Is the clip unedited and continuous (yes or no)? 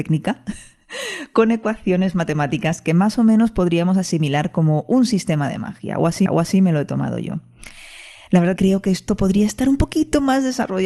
no